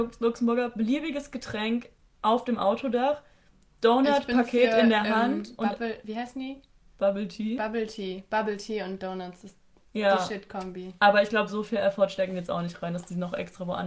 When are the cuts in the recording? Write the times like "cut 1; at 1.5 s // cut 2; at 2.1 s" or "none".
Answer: none